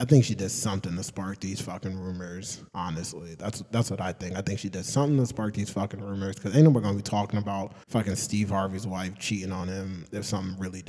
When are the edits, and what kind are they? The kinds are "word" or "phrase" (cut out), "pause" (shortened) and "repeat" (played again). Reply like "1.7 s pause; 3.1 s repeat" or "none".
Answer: 2.7 s pause; 7.8 s pause